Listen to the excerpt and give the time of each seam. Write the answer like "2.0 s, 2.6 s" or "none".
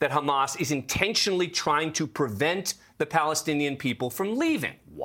none